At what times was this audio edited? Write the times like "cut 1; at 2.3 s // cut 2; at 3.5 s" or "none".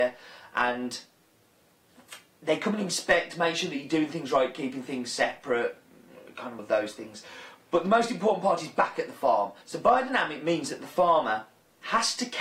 cut 1; at 6.6 s // cut 2; at 9.6 s